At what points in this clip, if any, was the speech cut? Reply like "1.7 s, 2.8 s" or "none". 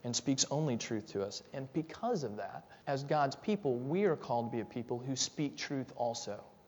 2.8 s

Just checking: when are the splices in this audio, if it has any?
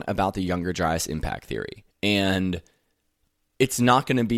1.9 s

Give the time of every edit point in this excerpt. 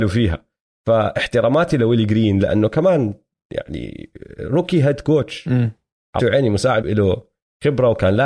6.2 s, 6.8 s

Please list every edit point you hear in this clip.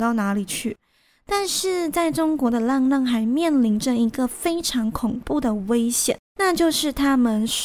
6.3 s

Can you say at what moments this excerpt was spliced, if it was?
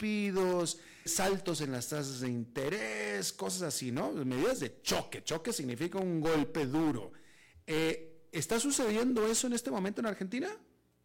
1.1 s

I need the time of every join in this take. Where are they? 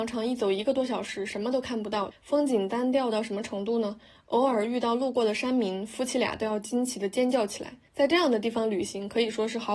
2.1 s, 7.9 s

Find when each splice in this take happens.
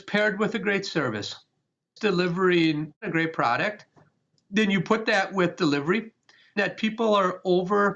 none

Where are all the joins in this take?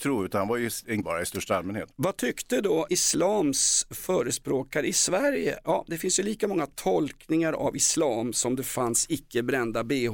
1.0 s, 2.9 s

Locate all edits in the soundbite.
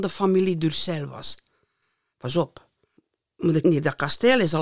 3.6 s

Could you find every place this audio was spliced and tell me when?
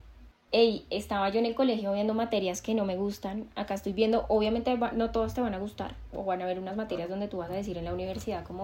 none

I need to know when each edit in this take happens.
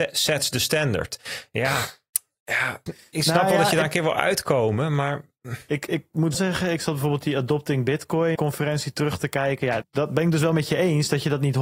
2.9 s, 6.3 s, 8.4 s, 9.8 s

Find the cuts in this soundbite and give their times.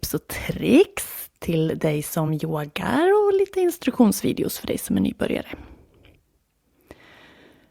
none

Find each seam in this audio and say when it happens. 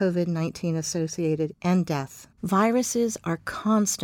1.5 s, 2.3 s

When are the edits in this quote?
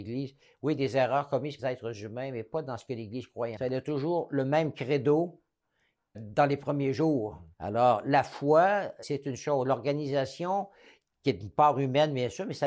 1.6 s, 3.6 s, 6.1 s, 7.5 s, 9.0 s

